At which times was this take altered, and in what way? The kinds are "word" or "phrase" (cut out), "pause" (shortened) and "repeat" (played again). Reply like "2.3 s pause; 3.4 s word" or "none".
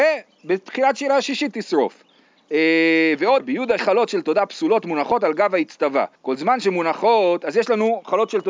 3.4 s word; 3.8 s word; 6.1 s pause